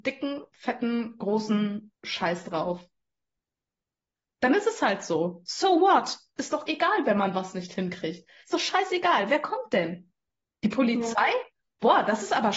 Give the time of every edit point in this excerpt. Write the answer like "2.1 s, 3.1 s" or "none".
2.0 s, 6.7 s